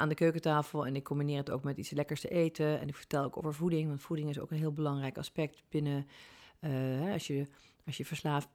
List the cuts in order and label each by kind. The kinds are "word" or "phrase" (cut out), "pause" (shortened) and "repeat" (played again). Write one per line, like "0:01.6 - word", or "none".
none